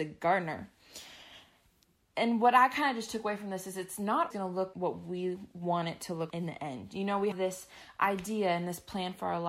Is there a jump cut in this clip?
yes; 4 cuts; at 4.3 s, 4.7 s, 6.3 s, 7.3 s

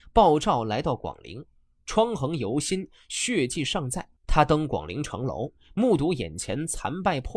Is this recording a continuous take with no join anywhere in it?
no; 1 cut; at 4.2 s

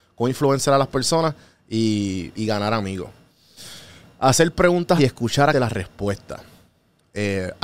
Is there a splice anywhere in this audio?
yes; 3 cuts; at 2.4 s, 5.0 s, 5.5 s

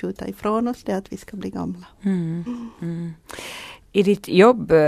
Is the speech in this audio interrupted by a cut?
yes; 1 cut; at 1.9 s

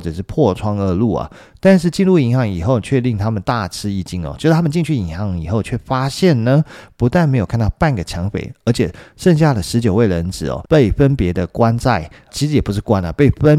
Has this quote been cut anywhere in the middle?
yes; 2 cuts; at 10.7 s, 12.3 s

